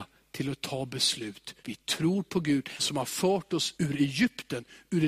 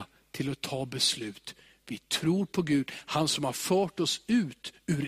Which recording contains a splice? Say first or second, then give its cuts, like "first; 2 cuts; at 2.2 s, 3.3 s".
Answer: first; 3 cuts; at 1.6 s, 2.8 s, 3.8 s